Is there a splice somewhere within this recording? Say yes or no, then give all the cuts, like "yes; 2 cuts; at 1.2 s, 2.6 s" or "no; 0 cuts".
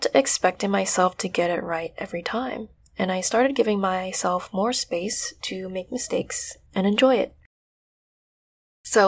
yes; 1 cut; at 6.7 s